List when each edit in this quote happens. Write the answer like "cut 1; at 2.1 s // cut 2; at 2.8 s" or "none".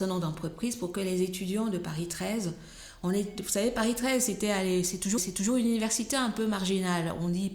cut 1; at 5.2 s